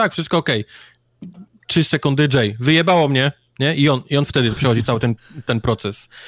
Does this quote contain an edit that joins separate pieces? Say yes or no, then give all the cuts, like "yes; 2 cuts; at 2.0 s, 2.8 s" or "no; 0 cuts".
no; 0 cuts